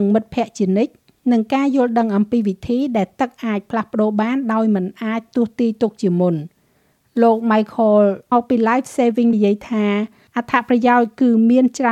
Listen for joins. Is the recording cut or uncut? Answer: cut